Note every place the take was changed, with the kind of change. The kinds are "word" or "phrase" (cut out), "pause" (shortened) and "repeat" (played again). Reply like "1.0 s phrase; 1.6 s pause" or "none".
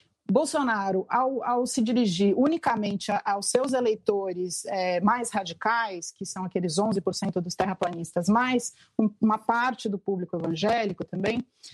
none